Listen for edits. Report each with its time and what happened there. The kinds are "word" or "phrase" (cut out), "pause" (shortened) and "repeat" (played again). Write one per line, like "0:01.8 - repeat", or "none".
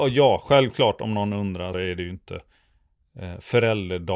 0:01.7 - word